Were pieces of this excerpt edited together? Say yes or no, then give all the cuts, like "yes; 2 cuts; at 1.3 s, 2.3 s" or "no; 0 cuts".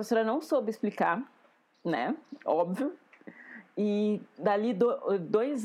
no; 0 cuts